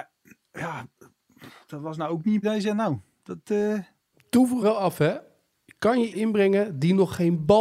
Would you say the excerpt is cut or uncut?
cut